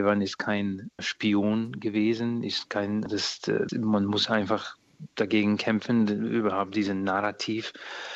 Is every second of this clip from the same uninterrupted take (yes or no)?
no